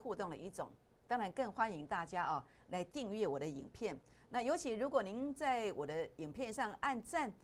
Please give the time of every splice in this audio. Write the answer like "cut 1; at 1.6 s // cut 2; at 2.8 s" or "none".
none